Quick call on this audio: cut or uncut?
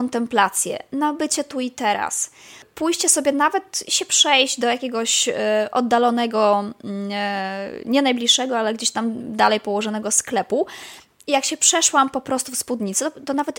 uncut